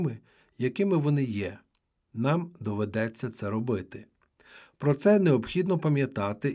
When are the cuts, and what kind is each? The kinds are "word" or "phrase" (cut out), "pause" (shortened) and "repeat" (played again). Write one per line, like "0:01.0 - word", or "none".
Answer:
none